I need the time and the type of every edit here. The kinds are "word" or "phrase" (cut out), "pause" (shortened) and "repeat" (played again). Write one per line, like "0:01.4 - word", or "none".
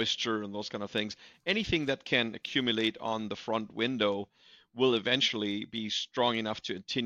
none